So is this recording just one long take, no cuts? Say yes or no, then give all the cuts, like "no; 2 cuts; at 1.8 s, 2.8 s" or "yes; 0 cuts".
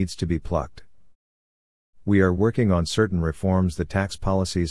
yes; 0 cuts